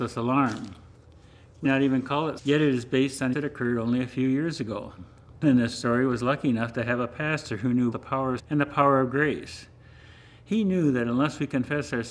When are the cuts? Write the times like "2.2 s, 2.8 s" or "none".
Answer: 1.6 s, 2.4 s, 3.3 s, 5.4 s, 7.9 s, 8.4 s